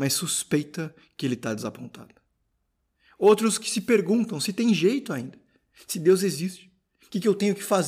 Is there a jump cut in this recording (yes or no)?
no